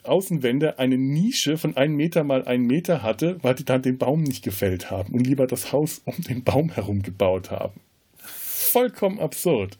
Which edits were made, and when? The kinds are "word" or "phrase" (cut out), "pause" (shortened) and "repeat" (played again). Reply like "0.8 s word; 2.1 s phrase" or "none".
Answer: none